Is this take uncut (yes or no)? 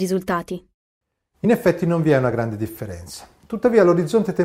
yes